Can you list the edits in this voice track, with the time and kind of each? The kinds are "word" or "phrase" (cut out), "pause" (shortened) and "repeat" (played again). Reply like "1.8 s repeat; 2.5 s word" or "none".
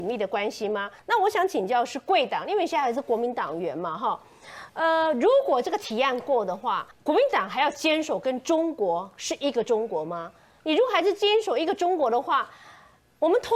1.0 s pause; 6.9 s pause